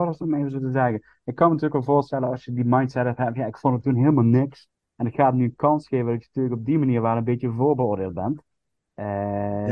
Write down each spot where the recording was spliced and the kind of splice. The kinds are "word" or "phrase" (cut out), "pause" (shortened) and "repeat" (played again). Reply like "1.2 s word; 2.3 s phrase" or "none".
4.7 s pause